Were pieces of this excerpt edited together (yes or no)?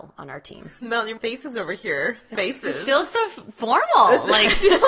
yes